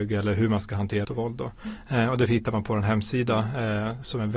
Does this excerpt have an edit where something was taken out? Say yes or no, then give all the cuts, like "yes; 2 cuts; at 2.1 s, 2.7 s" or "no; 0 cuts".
yes; 1 cut; at 1.0 s